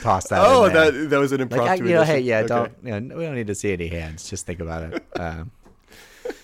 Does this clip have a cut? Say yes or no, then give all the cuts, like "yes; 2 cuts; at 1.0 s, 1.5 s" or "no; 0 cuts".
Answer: no; 0 cuts